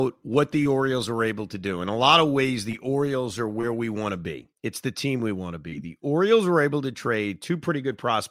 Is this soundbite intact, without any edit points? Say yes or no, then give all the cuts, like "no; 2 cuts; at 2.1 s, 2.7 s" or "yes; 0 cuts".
no; 1 cut; at 4.5 s